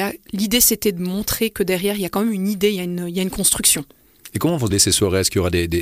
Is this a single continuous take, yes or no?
no